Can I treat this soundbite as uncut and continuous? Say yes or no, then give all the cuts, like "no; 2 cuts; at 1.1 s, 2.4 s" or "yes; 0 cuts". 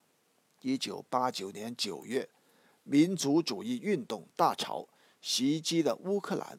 yes; 0 cuts